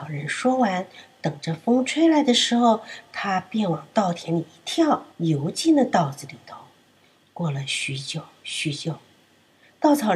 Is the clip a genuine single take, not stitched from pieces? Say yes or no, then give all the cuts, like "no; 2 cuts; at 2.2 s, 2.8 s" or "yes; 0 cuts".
no; 1 cut; at 5.1 s